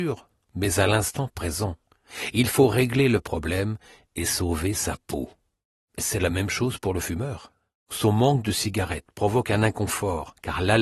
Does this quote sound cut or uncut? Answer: uncut